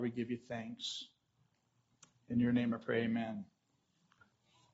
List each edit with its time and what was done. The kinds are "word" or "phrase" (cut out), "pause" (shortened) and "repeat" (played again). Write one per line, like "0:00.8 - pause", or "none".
none